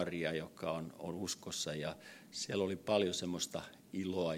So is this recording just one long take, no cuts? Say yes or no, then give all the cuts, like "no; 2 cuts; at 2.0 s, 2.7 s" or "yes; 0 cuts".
yes; 0 cuts